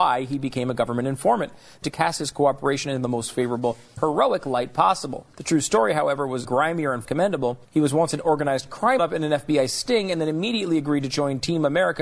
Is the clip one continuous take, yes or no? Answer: no